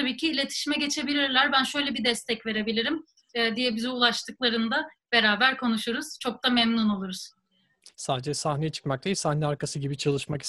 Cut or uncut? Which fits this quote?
uncut